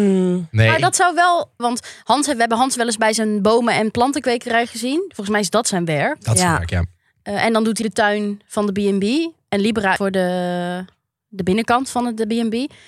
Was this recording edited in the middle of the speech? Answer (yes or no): yes